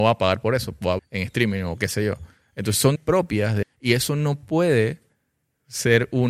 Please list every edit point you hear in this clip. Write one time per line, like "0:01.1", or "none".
0:01.0
0:03.0
0:03.6

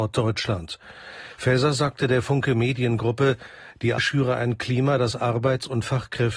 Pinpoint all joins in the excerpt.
0:04.0

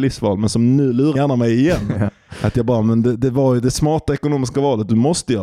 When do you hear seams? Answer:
0:01.2

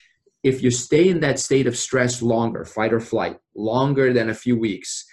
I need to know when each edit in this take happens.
none

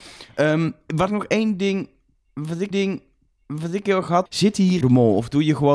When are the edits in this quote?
0:01.1
0:02.7
0:04.3
0:04.8

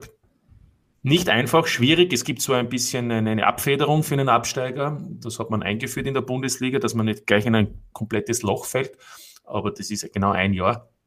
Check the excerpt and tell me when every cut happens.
none

